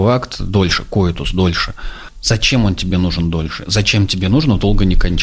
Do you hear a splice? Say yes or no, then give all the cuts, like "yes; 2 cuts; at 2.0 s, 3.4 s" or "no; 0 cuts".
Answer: no; 0 cuts